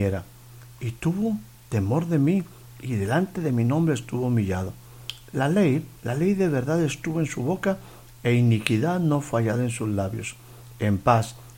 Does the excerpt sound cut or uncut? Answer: cut